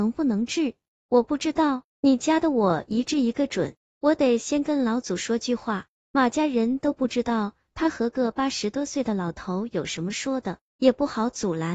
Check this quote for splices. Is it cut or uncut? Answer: cut